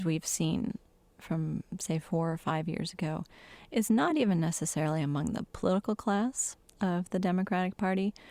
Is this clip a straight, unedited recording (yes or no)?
yes